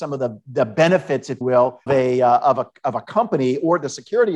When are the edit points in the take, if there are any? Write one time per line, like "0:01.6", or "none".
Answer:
0:01.4
0:01.9

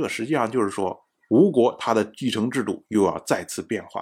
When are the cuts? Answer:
none

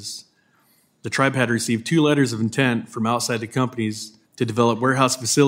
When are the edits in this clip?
0:04.2

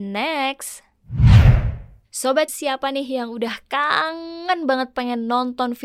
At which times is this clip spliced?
0:02.5

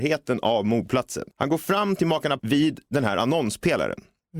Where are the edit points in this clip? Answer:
0:01.3
0:02.4

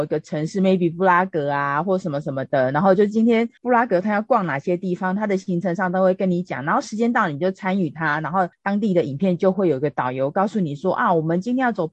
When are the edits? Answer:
0:03.6
0:08.5

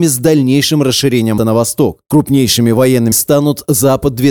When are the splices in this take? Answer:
0:01.4
0:03.1

